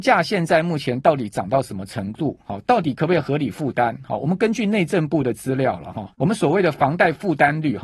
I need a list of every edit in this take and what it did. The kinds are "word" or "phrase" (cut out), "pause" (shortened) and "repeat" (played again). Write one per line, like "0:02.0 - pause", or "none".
0:06.1 - pause